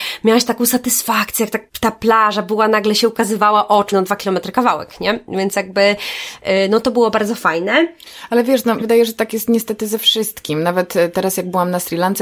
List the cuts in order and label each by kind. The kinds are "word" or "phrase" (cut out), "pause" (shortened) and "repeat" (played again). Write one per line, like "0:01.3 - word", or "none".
0:01.7 - pause
0:03.9 - word
0:08.8 - word